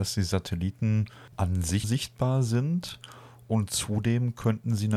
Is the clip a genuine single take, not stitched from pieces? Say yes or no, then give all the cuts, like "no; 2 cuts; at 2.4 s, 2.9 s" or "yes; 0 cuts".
no; 2 cuts; at 1.3 s, 1.8 s